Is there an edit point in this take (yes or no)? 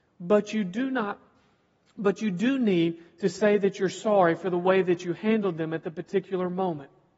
no